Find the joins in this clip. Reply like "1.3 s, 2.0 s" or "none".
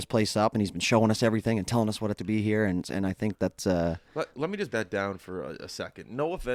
2.2 s, 4.3 s, 4.7 s